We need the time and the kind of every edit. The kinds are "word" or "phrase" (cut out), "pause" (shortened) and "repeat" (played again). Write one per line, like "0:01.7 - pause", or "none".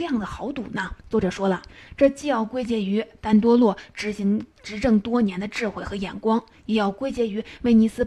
0:01.0 - pause